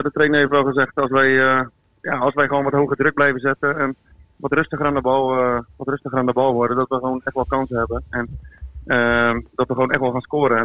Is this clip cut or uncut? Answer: uncut